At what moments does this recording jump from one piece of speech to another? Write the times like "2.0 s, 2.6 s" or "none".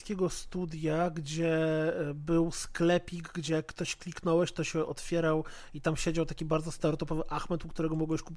none

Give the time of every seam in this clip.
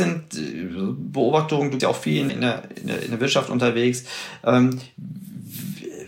1.8 s, 2.3 s

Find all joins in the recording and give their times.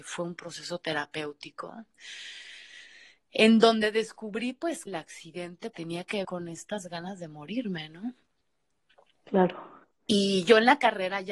4.9 s, 5.7 s, 6.2 s

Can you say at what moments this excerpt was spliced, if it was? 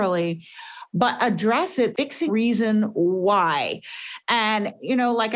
1.9 s, 2.3 s

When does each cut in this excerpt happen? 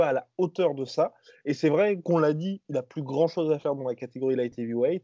none

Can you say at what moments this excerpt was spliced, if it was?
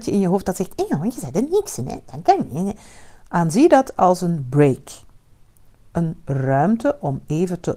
none

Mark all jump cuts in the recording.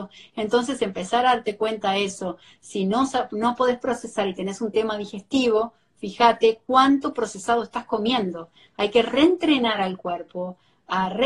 none

